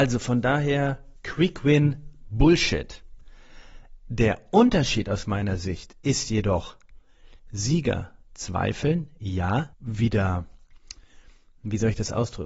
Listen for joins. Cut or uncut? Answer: cut